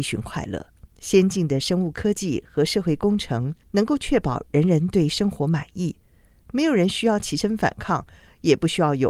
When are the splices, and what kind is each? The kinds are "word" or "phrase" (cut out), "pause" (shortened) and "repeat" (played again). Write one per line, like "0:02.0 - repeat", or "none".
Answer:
0:00.9 - pause
0:03.6 - pause